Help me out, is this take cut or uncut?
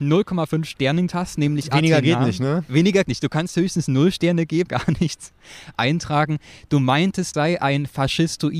cut